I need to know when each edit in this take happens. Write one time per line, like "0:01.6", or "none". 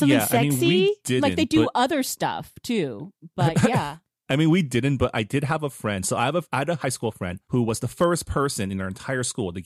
0:07.4